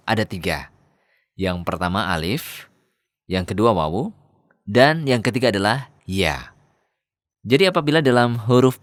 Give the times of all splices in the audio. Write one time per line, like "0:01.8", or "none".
0:06.0